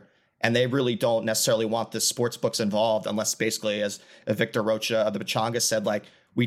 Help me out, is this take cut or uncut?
uncut